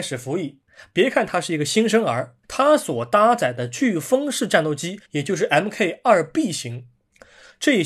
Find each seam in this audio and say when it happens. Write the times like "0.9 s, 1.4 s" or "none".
2.4 s, 5.0 s